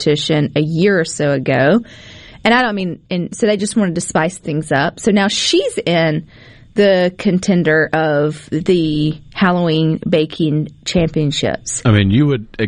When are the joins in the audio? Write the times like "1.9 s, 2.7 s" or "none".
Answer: none

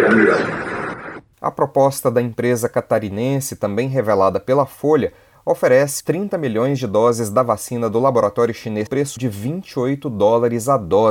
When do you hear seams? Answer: 6.0 s, 8.9 s, 9.2 s

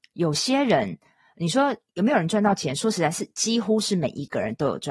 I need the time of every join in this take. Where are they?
none

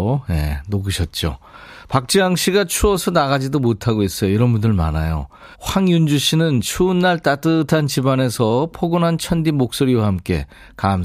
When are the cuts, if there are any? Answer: 5.5 s

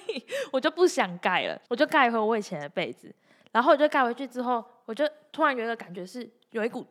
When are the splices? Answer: 1.7 s

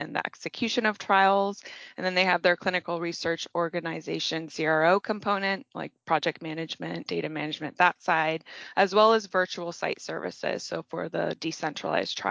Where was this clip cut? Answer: none

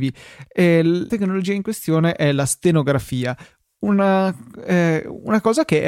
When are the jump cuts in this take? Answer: 1.1 s

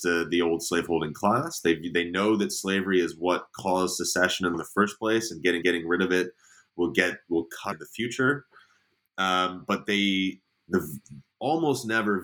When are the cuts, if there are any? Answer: 4.5 s, 5.6 s, 7.7 s

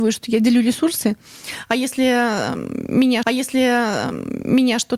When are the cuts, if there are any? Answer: 3.2 s

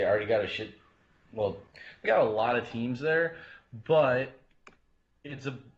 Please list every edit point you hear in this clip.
2.1 s

